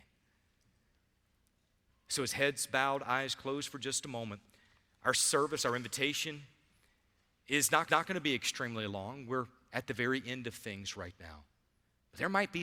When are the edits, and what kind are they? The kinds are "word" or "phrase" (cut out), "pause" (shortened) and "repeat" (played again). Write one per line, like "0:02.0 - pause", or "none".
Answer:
0:07.9 - repeat